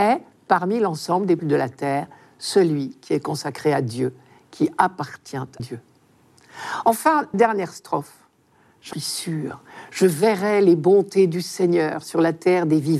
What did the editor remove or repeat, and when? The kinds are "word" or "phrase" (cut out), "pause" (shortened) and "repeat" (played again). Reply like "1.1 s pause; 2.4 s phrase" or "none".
1.4 s word; 5.6 s word; 7.3 s word; 8.9 s word